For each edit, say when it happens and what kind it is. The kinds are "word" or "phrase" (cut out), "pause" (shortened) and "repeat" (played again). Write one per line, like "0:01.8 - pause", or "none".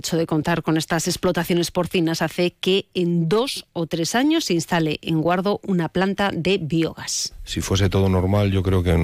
none